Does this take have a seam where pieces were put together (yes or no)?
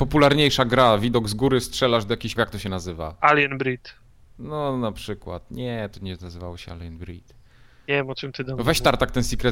yes